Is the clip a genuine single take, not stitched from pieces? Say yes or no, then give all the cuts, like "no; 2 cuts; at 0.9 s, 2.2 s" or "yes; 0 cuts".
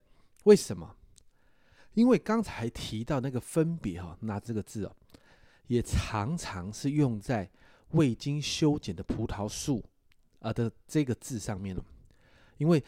no; 1 cut; at 4.4 s